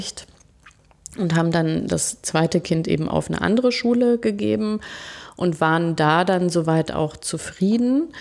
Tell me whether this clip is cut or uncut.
uncut